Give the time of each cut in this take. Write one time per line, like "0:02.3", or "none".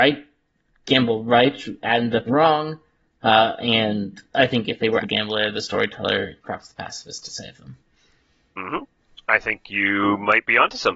0:02.3
0:05.0
0:06.4